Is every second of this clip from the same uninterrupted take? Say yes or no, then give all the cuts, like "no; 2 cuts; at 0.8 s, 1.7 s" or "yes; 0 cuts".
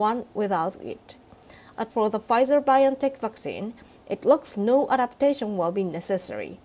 no; 2 cuts; at 1.9 s, 4.5 s